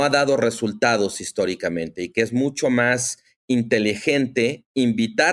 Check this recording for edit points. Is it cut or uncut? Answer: uncut